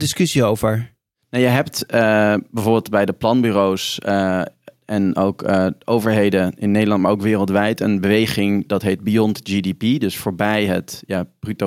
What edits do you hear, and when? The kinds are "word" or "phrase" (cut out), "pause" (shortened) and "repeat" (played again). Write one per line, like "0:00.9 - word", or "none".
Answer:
none